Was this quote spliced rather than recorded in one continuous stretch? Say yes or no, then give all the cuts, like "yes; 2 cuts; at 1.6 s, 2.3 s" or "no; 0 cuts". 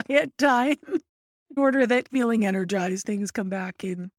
yes; 3 cuts; at 1.6 s, 2.1 s, 3.0 s